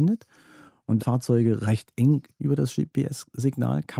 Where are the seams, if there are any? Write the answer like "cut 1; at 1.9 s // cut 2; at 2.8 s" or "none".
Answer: cut 1; at 1.0 s // cut 2; at 2.4 s